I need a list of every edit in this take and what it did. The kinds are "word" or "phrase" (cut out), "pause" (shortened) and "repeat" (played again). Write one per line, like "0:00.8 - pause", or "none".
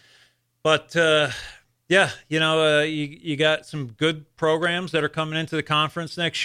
none